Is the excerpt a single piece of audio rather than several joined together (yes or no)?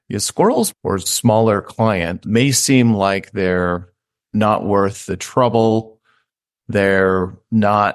yes